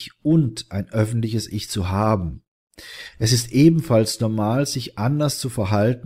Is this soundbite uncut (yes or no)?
yes